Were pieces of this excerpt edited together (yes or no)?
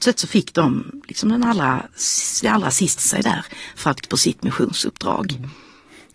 yes